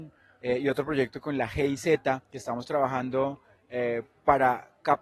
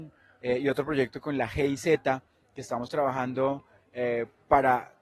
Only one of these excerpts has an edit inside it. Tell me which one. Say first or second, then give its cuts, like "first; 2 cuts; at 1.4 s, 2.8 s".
first; 1 cut; at 2.2 s